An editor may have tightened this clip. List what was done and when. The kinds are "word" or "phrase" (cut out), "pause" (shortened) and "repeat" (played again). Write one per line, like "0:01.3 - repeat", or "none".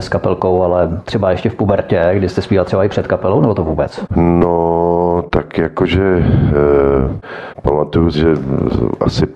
0:08.1 - word